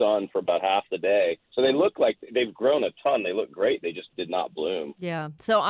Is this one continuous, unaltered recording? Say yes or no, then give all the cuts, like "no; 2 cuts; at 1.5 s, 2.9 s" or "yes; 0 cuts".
no; 1 cut; at 1.4 s